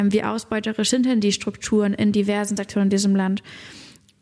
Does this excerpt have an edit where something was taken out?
no; 0 cuts

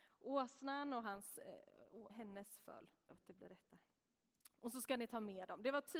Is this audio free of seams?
no; 2 cuts; at 2.1 s, 3.1 s

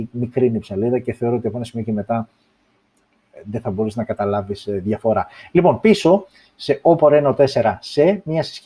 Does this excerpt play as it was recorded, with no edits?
yes; 0 cuts

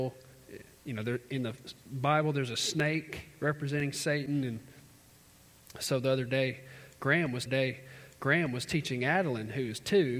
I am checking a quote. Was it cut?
yes; 1 cut; at 7.5 s

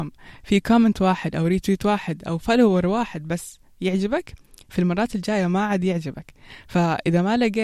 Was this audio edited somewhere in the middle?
no; 0 cuts

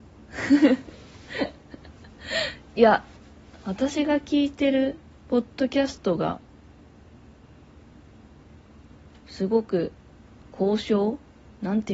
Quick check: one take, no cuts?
no; 1 cut; at 9.1 s

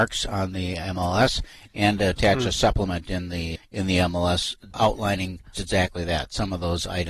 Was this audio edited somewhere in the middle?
yes; 3 cuts; at 3.6 s, 4.7 s, 5.5 s

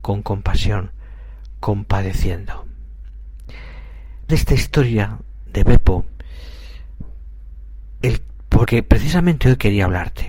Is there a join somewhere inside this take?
yes; 3 cuts; at 4.3 s, 8.0 s, 8.7 s

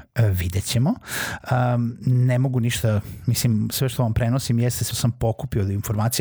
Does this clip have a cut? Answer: yes; 1 cut; at 4.9 s

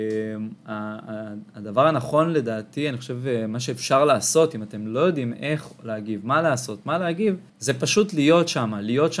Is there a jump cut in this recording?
yes; 1 cut; at 7.5 s

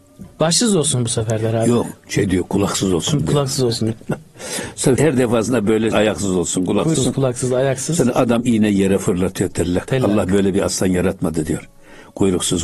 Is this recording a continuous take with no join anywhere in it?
no; 4 cuts; at 2.0 s, 5.0 s, 5.9 s, 6.9 s

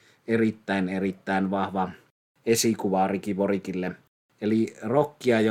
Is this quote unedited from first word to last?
yes; 0 cuts

